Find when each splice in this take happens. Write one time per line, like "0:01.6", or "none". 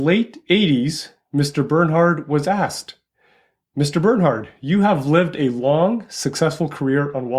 none